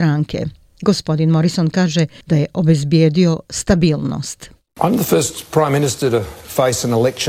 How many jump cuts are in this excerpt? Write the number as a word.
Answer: zero